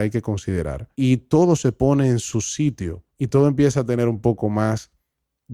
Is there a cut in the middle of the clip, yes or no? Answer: yes